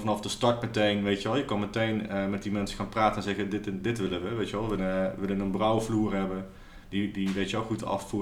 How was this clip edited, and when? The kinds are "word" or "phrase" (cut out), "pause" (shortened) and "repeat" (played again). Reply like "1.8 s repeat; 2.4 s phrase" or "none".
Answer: 4.8 s word